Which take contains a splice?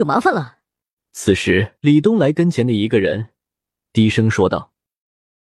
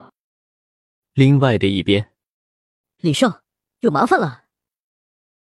first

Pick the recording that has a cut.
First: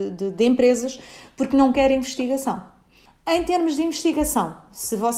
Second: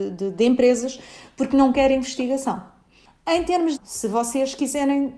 second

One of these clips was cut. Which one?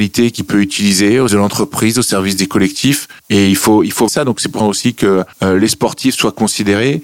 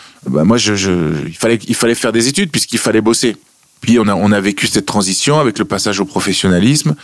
first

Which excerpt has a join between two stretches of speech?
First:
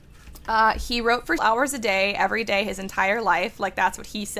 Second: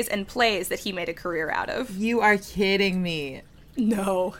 first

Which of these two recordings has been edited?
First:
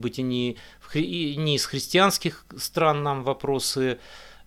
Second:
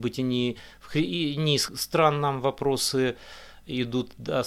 second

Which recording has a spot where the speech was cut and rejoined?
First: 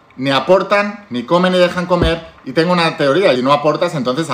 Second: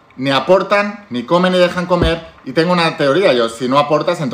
first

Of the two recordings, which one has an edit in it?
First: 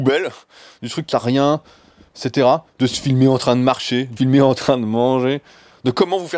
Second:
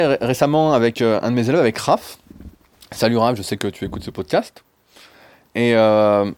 first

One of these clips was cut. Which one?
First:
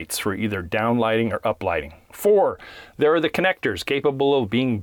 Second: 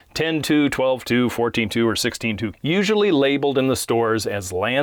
second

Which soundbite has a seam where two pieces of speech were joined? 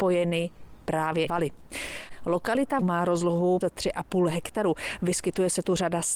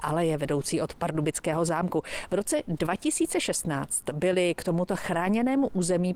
first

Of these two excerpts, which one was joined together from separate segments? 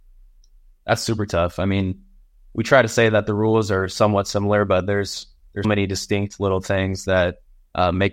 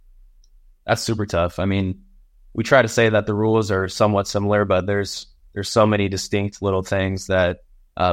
first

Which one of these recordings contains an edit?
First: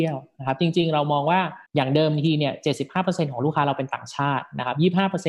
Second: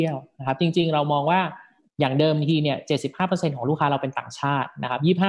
first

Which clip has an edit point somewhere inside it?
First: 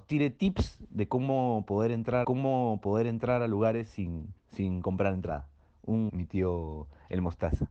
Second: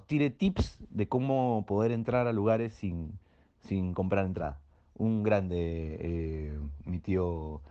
first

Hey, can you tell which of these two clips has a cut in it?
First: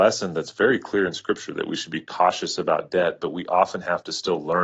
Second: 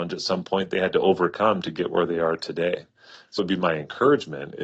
second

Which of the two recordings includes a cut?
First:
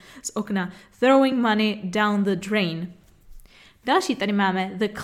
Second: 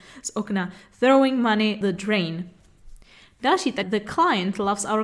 second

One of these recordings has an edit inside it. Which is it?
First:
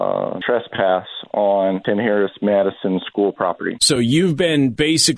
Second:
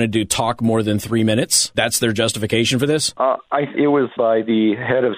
second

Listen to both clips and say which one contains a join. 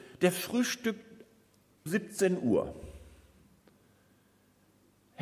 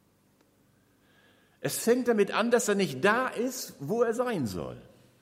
first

